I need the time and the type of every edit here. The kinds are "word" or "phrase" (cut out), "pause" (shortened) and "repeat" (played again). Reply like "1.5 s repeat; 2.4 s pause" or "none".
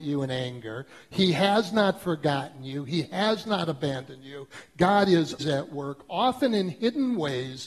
5.4 s word